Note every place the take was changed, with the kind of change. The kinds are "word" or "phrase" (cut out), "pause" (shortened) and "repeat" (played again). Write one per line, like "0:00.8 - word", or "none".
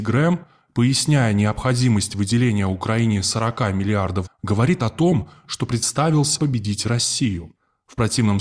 0:04.3 - word
0:06.4 - word